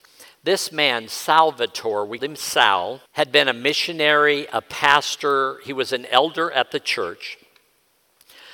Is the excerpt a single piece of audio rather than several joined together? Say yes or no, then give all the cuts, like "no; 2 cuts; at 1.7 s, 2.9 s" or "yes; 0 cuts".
no; 2 cuts; at 2.2 s, 3.1 s